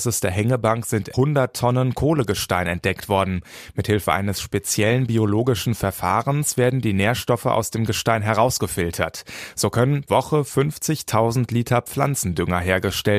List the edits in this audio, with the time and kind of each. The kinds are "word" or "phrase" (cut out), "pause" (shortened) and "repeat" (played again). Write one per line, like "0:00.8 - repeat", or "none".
0:01.1 - word
0:10.1 - word